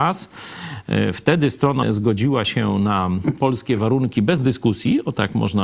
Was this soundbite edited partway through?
yes; 1 cut; at 1.8 s

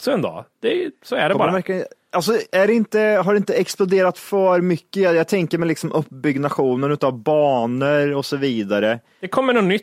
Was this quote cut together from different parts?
no; 0 cuts

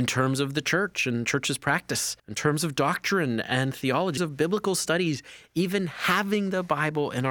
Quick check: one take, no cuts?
no; 2 cuts; at 2.2 s, 4.2 s

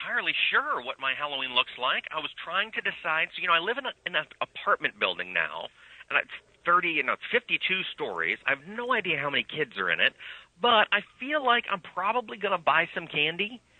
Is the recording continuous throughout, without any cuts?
yes; 0 cuts

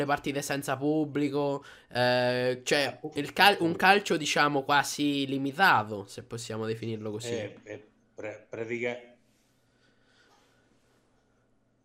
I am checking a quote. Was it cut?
no; 0 cuts

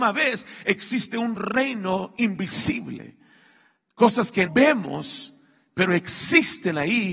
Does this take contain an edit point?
yes; 1 cut; at 4.5 s

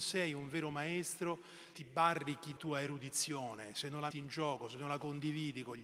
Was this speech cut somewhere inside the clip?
yes; 3 cuts; at 1.7 s, 2.6 s, 4.1 s

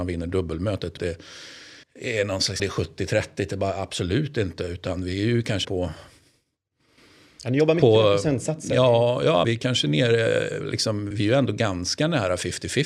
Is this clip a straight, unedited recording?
no; 6 cuts; at 1.0 s, 1.8 s, 2.6 s, 5.6 s, 9.4 s, 11.1 s

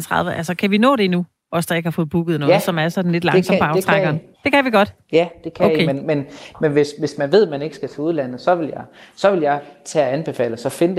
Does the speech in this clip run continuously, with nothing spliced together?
no; 1 cut; at 4.3 s

